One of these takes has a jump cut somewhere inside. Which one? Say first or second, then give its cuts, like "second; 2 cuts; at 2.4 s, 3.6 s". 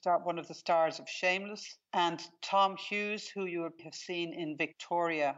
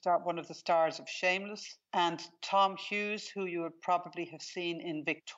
first; 1 cut; at 3.8 s